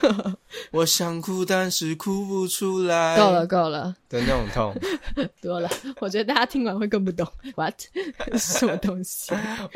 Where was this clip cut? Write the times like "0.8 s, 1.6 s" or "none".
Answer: 7.5 s

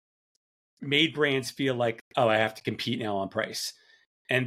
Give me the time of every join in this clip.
none

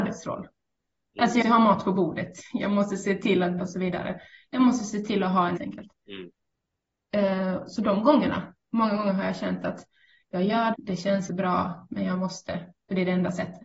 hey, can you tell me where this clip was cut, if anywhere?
1.4 s, 3.6 s, 5.6 s, 6.0 s, 10.7 s, 11.3 s

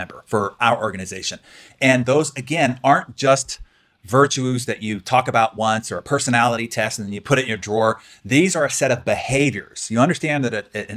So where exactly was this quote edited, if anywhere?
none

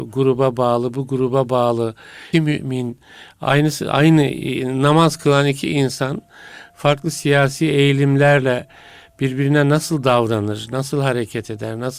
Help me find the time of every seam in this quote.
2.3 s

